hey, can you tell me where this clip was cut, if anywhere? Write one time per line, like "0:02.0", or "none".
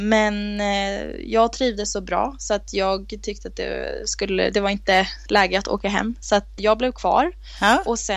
0:06.6

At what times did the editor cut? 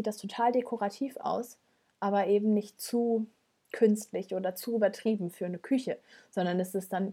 none

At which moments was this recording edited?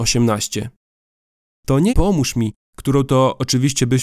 0:01.9

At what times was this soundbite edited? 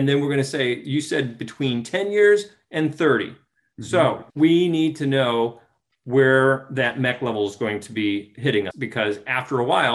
0:04.3
0:08.7

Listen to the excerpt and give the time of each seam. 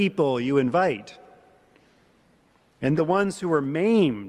0:03.0

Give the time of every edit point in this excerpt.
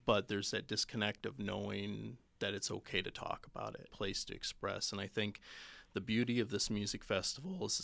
0:03.9

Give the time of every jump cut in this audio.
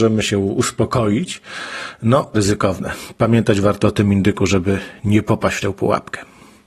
0:02.3

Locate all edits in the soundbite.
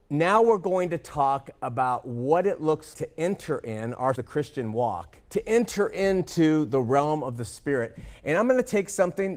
0:02.9
0:04.2
0:05.2

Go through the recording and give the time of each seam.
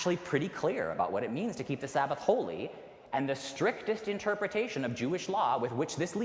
none

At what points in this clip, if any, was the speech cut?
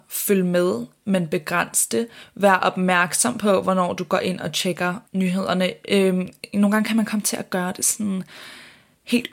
0:05.1

